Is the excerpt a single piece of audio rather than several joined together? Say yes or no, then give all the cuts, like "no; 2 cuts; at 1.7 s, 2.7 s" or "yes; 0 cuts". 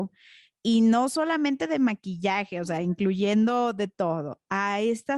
yes; 0 cuts